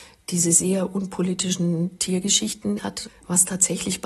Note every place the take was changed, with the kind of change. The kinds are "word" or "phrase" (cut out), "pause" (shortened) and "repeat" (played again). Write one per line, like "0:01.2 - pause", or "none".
0:02.8 - word